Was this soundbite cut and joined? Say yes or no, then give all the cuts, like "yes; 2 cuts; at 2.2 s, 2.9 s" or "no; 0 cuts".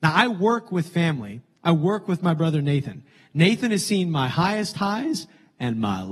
no; 0 cuts